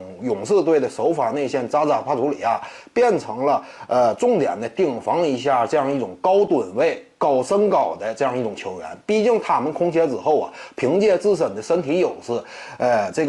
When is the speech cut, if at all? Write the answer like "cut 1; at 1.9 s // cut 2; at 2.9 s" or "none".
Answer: none